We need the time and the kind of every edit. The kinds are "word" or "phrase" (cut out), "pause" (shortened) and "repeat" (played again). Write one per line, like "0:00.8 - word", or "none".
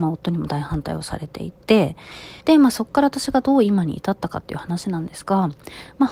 0:02.4 - pause